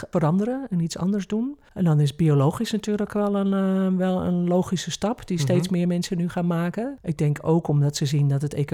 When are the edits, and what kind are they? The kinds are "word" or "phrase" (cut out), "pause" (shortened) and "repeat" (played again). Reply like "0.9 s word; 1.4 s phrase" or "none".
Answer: 1.7 s pause